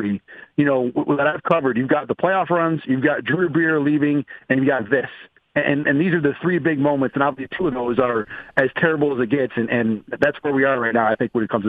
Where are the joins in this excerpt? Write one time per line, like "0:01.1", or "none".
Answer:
none